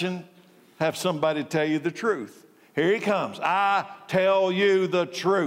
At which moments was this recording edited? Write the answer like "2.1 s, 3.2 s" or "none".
none